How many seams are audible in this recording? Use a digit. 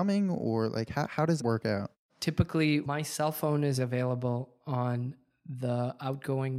3